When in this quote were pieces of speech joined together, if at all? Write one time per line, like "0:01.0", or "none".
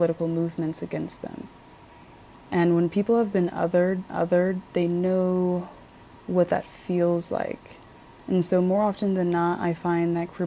0:04.1